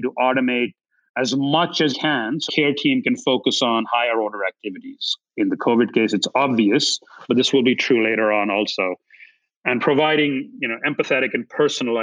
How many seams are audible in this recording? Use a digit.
3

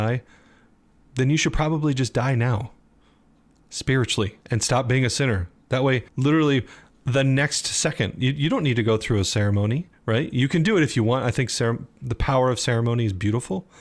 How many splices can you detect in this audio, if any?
3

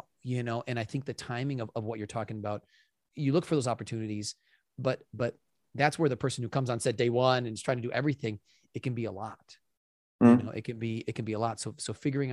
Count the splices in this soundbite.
0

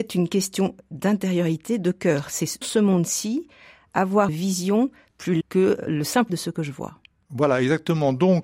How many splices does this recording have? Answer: 5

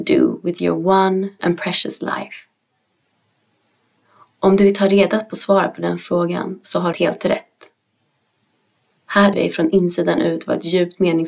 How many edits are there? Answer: 3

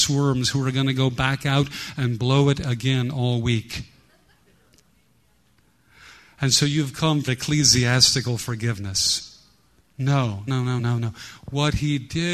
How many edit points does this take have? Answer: 3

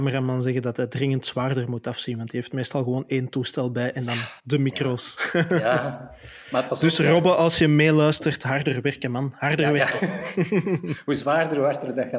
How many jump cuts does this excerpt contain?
1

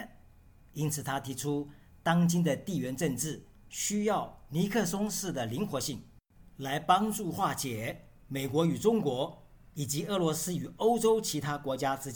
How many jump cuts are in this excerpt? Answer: 0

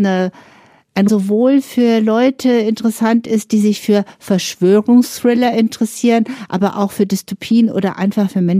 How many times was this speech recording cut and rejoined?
1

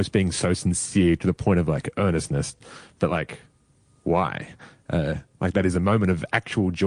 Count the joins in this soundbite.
0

